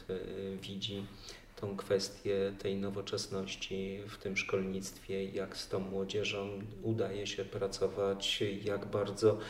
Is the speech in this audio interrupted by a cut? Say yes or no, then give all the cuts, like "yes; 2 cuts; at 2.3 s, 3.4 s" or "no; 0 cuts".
no; 0 cuts